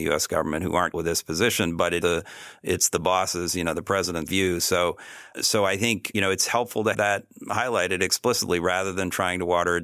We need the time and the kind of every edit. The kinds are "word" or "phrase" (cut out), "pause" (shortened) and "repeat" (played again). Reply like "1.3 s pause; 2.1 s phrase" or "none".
0.9 s word; 2.0 s word; 4.3 s word; 5.3 s word; 6.1 s word; 6.9 s word